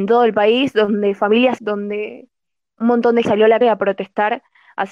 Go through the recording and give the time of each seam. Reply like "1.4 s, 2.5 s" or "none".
1.6 s, 3.2 s, 3.6 s